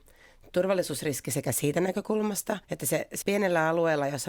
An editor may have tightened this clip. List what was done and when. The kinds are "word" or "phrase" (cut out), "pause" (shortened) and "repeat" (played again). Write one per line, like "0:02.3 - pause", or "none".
0:02.6 - pause
0:03.2 - word

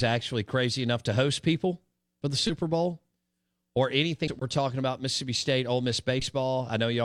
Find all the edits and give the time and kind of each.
0:04.3 - word

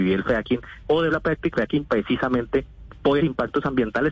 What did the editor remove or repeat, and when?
0:01.1 - word
0:01.5 - word
0:03.2 - word

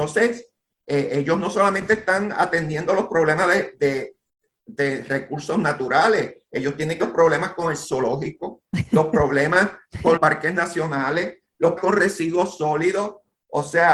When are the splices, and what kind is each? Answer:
0:03.8 - word
0:07.0 - word
0:10.2 - word
0:11.8 - word

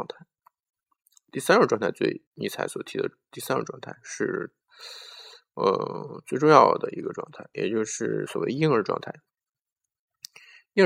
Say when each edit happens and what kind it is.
0:02.3 - pause
0:04.6 - pause

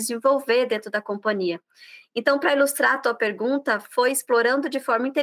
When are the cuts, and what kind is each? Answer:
none

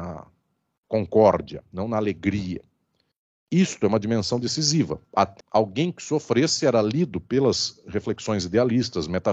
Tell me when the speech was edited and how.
0:05.4 - word

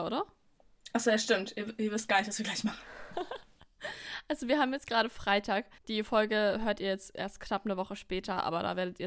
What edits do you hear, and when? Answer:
0:03.4 - pause
0:05.8 - pause

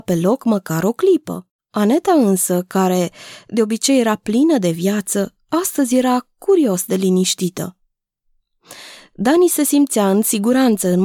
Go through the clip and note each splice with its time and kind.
0:01.6 - pause

